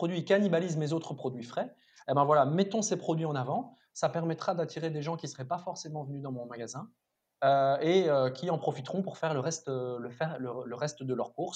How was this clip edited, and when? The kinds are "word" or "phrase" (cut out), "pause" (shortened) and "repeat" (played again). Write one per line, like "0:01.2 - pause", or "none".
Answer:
none